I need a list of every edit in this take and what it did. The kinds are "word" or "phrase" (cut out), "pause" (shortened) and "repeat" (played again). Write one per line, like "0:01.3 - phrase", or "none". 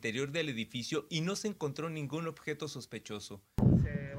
none